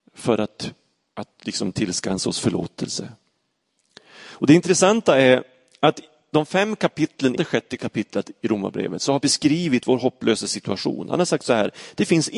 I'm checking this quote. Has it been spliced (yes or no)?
yes